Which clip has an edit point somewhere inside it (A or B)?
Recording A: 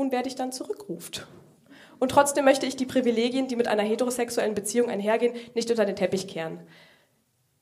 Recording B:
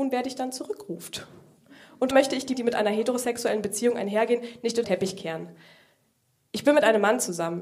B